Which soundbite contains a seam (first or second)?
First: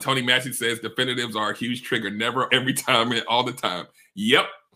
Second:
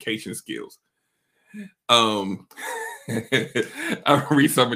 first